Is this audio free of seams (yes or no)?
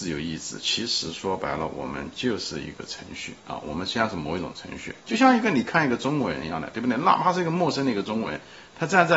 no